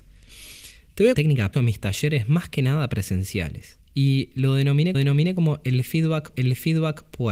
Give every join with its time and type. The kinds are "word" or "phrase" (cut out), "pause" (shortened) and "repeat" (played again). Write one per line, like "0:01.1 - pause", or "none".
0:01.1 - phrase
0:01.5 - phrase
0:03.8 - pause
0:04.9 - repeat
0:06.3 - repeat